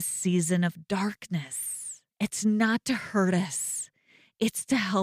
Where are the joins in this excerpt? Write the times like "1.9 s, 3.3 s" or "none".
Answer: 2.1 s